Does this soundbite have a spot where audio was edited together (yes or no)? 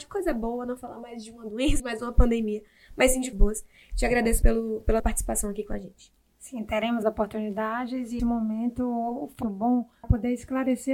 yes